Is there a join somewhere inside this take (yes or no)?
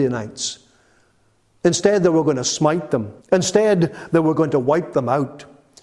yes